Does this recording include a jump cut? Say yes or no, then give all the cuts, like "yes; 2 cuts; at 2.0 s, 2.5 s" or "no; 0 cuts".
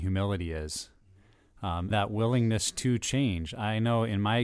yes; 1 cut; at 1.9 s